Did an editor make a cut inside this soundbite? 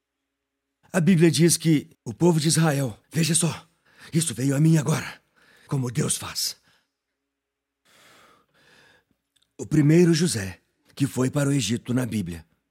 yes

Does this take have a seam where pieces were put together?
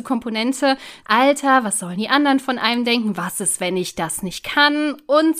yes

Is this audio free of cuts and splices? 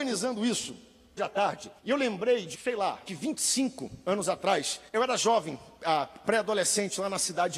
no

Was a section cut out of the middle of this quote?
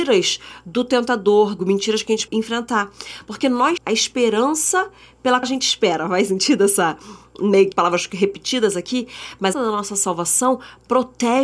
yes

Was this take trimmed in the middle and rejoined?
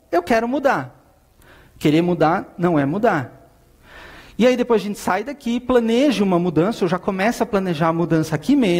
no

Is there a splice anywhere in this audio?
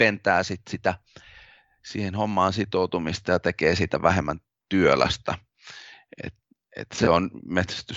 no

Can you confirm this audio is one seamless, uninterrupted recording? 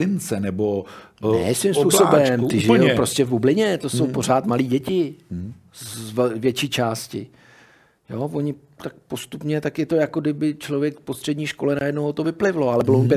yes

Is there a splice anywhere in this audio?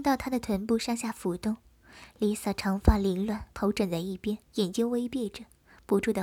yes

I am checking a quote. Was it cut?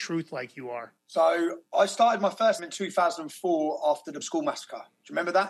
yes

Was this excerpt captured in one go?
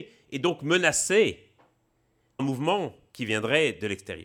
no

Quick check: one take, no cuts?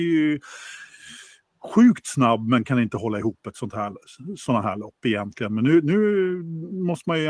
yes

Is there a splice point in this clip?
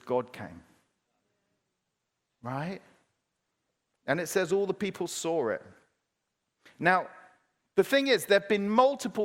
no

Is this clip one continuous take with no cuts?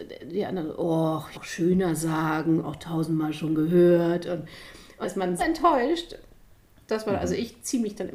no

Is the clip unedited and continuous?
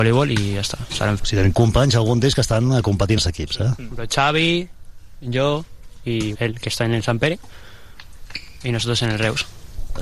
no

